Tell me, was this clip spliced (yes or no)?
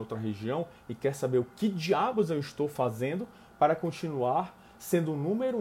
no